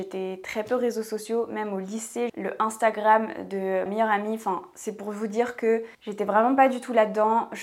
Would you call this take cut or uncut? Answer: cut